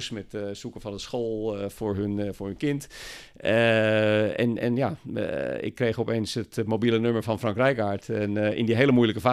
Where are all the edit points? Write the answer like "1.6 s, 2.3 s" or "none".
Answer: none